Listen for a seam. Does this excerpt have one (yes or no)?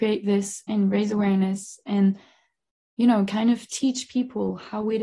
no